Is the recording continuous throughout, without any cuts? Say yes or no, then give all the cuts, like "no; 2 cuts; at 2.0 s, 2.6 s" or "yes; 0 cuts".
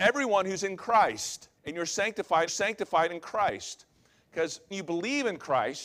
no; 3 cuts; at 1.6 s, 2.5 s, 4.7 s